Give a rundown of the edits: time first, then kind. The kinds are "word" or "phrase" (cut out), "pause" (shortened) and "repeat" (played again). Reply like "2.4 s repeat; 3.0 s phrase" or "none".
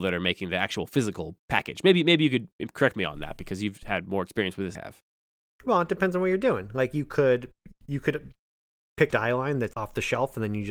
1.4 s pause; 4.7 s phrase; 9.1 s phrase; 9.7 s word